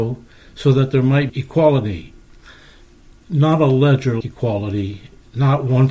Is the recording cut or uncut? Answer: cut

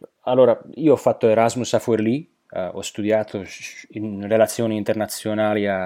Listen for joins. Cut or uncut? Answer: uncut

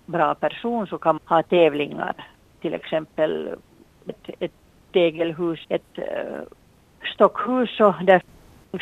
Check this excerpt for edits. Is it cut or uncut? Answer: cut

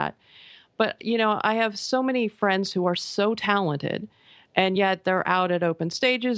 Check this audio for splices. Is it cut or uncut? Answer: uncut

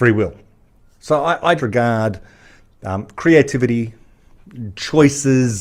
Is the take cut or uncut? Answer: cut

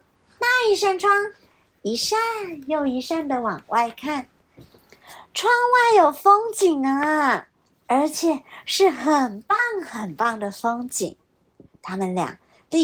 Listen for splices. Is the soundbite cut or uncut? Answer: uncut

